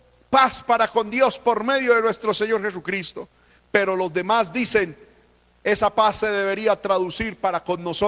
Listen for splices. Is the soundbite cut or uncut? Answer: uncut